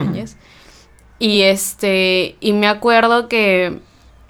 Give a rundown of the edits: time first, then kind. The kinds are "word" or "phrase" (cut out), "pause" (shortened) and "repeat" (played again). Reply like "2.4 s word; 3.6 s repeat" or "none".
none

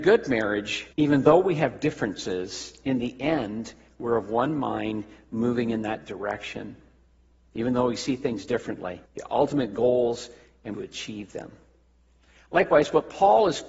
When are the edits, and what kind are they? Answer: 0.9 s pause; 9.1 s pause; 10.7 s phrase

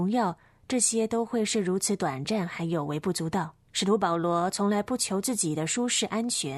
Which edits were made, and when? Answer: 3.6 s pause

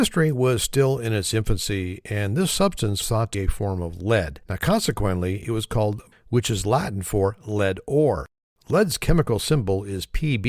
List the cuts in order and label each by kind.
3.0 s word; 3.3 s word; 4.4 s pause; 6.1 s word

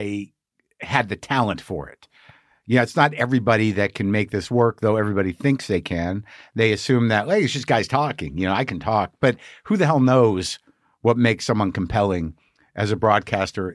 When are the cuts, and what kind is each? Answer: none

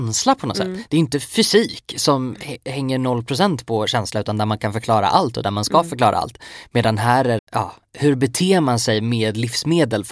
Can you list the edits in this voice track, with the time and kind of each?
7.4 s phrase

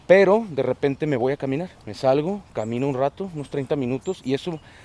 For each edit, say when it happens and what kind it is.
1.8 s pause

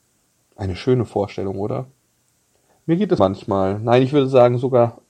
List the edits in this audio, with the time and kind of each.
3.2 s word

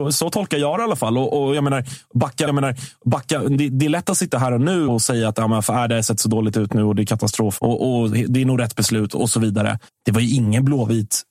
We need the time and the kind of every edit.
2.5 s repeat; 4.9 s word; 7.6 s word; 9.9 s pause

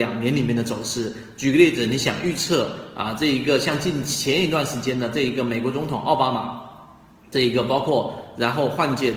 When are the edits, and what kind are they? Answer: none

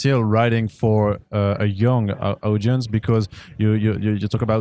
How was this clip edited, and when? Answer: none

